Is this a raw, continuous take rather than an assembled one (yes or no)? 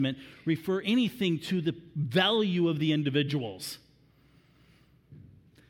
yes